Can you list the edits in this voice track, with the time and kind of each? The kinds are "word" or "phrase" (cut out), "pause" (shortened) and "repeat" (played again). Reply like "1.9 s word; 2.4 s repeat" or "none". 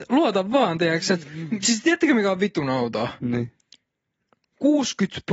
none